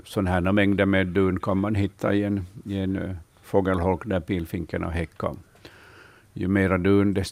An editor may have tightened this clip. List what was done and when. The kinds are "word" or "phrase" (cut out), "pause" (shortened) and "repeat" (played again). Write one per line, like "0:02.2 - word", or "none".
none